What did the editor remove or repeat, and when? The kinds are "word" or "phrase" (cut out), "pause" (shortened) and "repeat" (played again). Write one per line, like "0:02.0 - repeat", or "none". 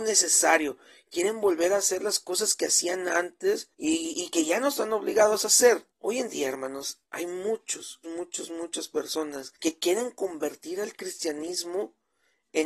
0:03.7 - pause
0:05.9 - pause
0:07.0 - pause
0:08.0 - word
0:09.6 - pause